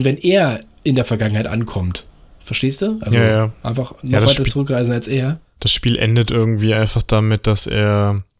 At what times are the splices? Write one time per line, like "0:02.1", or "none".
none